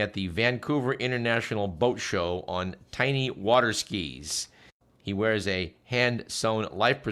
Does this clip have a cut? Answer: no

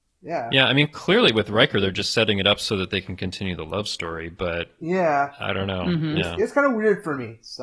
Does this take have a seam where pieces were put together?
no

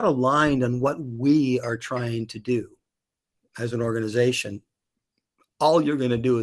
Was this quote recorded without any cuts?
yes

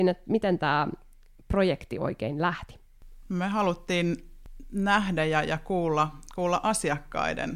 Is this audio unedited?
yes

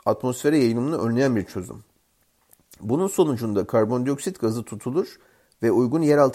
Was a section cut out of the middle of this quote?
no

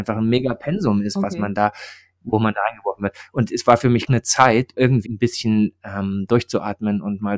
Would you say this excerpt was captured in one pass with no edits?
no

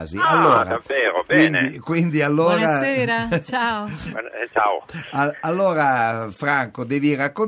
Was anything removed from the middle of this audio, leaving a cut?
no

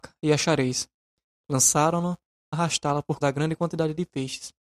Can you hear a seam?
yes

